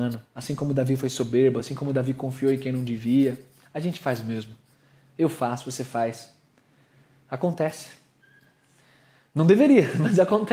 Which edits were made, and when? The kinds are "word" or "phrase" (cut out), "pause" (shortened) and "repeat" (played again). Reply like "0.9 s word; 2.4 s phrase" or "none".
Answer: none

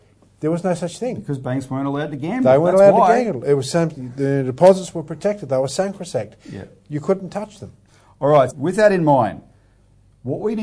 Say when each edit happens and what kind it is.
8.5 s word

